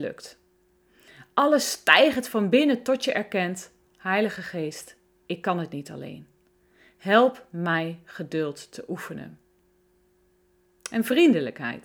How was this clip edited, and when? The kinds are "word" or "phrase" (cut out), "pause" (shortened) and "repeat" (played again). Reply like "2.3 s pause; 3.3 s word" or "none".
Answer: none